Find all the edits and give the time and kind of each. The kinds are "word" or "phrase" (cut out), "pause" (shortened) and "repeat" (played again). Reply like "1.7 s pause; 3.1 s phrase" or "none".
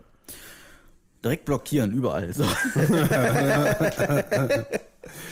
none